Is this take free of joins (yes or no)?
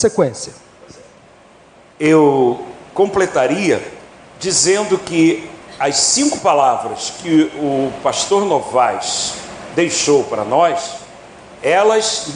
yes